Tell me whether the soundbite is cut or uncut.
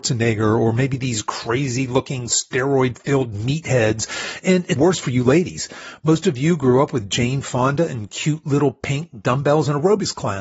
cut